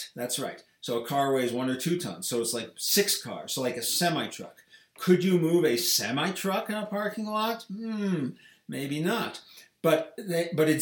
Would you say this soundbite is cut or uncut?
uncut